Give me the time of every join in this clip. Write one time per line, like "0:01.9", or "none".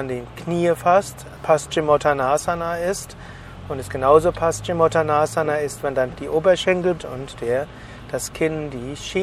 0:01.4
0:06.2
0:07.0